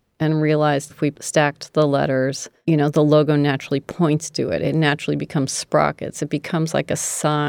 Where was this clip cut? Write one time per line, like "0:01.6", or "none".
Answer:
0:00.9